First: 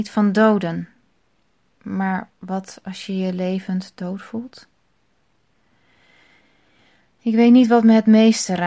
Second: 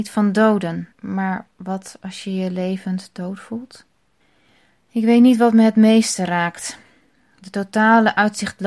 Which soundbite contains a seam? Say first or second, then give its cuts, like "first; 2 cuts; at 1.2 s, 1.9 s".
second; 2 cuts; at 0.9 s, 4.2 s